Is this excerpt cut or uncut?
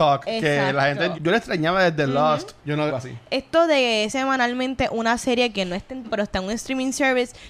cut